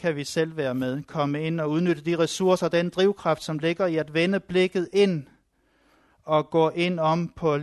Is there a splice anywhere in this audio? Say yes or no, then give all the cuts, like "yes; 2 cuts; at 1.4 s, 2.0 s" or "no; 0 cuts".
no; 0 cuts